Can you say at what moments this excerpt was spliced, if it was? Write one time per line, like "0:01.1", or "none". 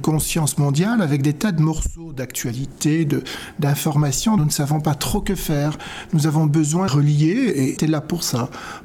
0:04.4
0:06.9
0:07.8